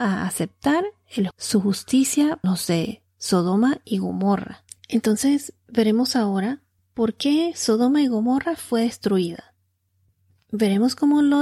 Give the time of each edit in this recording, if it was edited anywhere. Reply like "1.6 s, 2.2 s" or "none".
1.3 s, 2.4 s, 4.7 s, 6.8 s